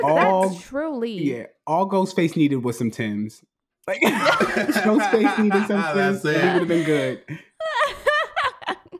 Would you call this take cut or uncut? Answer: uncut